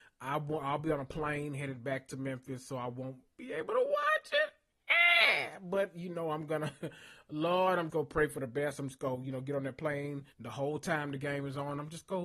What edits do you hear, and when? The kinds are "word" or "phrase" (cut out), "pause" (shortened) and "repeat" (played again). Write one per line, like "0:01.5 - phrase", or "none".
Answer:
0:07.9 - word
0:10.3 - pause